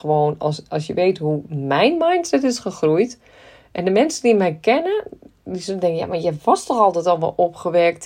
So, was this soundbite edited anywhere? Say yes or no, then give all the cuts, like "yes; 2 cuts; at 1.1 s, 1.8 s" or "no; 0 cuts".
no; 0 cuts